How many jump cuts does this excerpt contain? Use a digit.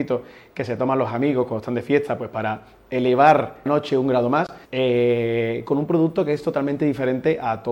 2